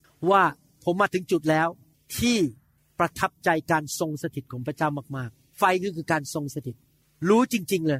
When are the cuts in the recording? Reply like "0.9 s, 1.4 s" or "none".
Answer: 5.5 s